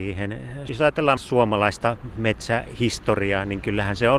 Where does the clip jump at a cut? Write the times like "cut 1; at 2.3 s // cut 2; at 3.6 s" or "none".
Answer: cut 1; at 1.2 s